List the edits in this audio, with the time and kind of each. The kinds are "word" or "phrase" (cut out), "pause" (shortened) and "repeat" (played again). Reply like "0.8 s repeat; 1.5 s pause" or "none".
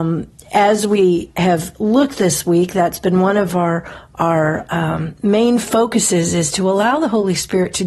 none